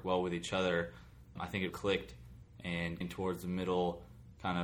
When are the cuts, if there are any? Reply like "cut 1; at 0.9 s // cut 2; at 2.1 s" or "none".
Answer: cut 1; at 1.4 s // cut 2; at 1.7 s // cut 3; at 3.0 s